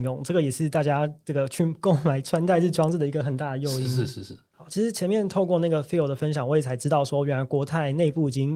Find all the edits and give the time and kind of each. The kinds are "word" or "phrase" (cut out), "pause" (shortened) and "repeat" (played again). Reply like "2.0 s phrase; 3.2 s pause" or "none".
4.5 s pause